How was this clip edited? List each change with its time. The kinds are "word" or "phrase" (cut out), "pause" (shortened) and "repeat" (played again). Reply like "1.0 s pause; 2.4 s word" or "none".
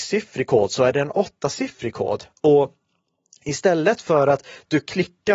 none